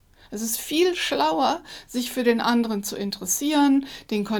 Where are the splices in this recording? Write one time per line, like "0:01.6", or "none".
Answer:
none